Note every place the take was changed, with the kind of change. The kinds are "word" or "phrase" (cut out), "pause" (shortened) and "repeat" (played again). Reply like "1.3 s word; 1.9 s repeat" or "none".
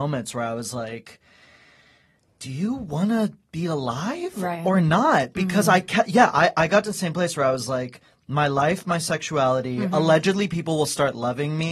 none